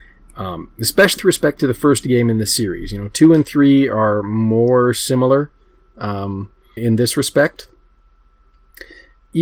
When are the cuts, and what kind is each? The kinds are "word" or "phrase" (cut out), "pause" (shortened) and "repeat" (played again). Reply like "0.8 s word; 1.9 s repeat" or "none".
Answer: 1.2 s word; 6.8 s word